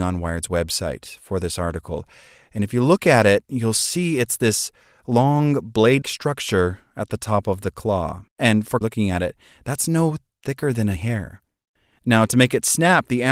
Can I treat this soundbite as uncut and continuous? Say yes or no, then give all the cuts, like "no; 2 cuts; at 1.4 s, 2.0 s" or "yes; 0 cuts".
no; 4 cuts; at 6.0 s, 8.3 s, 8.8 s, 11.0 s